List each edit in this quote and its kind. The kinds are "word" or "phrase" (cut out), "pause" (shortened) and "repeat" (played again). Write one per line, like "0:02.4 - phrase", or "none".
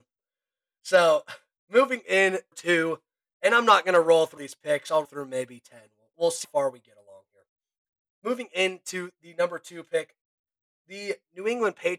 0:02.5 - phrase
0:04.4 - word
0:05.0 - word
0:06.1 - word
0:06.4 - word